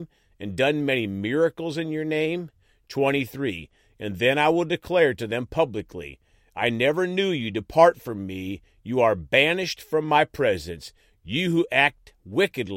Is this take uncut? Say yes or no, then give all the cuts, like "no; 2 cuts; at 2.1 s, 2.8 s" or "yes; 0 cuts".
yes; 0 cuts